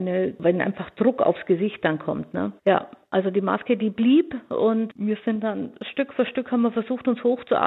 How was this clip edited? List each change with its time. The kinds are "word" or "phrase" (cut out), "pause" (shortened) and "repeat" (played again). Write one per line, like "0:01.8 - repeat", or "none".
0:02.6 - pause